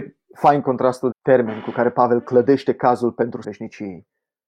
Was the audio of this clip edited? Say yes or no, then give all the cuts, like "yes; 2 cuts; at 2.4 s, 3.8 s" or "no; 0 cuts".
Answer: yes; 2 cuts; at 1.1 s, 3.4 s